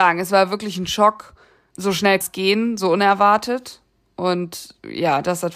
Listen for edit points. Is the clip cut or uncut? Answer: cut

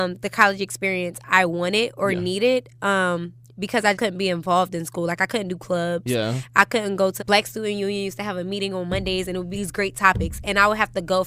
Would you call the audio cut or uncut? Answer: cut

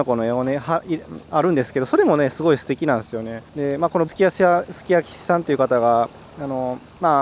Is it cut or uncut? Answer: cut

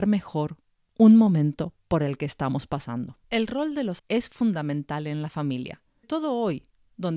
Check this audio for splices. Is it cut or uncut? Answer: cut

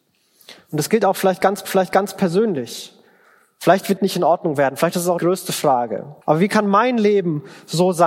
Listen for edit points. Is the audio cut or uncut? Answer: cut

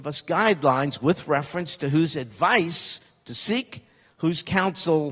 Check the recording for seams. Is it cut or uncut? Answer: uncut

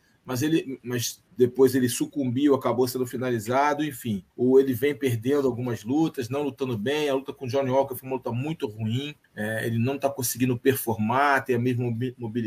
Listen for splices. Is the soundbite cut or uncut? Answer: cut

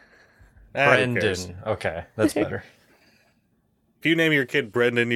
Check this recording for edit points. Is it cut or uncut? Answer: cut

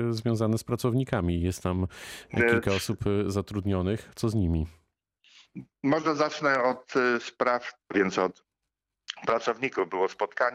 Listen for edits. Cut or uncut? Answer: cut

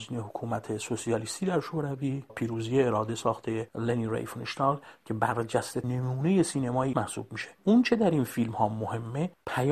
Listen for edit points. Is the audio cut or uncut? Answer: cut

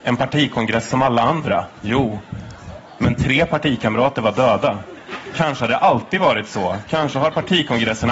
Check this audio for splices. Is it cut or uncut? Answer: uncut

